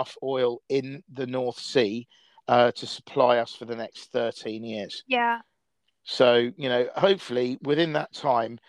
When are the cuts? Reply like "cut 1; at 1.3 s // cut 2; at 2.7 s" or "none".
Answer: none